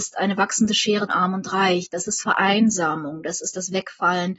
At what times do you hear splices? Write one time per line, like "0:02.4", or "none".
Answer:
0:01.1
0:02.2